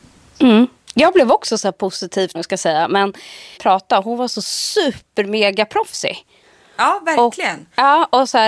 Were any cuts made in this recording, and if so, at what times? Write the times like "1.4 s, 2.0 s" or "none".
2.3 s, 3.6 s